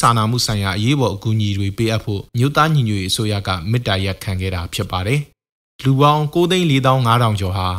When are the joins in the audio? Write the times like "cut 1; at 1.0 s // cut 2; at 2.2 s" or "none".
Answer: cut 1; at 2.3 s // cut 2; at 5.3 s